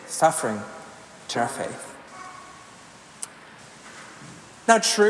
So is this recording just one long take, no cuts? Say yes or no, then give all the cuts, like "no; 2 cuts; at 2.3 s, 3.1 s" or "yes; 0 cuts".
no; 1 cut; at 1.3 s